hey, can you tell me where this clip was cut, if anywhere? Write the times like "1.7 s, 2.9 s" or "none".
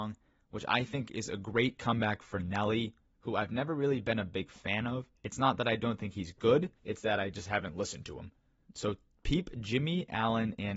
5.2 s, 6.8 s, 8.6 s